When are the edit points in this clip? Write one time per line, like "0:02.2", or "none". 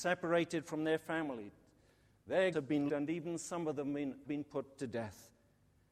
0:02.5
0:02.9
0:04.3

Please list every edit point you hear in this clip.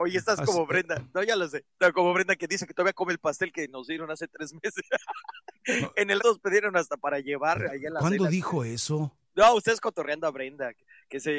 0:06.2
0:09.2

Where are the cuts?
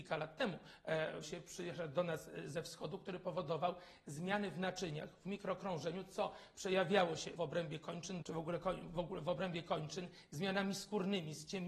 0:01.2
0:07.4
0:08.2

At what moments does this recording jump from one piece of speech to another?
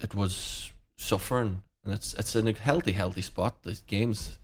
none

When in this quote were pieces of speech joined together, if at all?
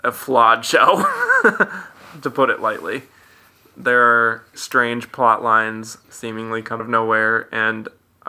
0:04.5
0:06.0
0:06.8

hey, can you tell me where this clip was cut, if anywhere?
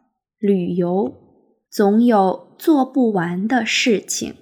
0:01.6

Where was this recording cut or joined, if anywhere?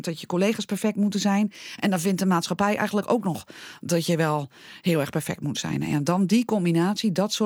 none

